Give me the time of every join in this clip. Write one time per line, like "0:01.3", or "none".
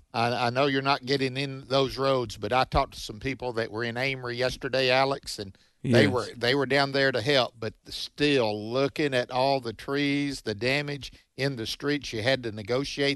none